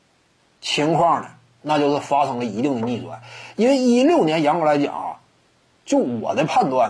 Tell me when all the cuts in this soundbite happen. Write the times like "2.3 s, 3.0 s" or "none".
none